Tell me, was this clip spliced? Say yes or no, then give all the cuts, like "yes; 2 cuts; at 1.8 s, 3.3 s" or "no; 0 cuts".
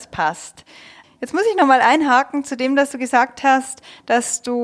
no; 0 cuts